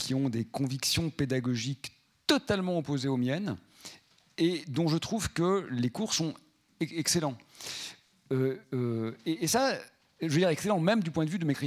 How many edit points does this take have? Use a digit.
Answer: 0